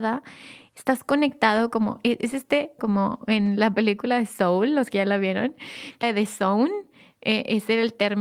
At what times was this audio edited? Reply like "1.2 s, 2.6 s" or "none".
2.8 s, 6.0 s